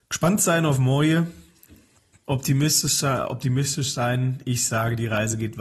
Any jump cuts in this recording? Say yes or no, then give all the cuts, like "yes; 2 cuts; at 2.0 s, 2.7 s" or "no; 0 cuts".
no; 0 cuts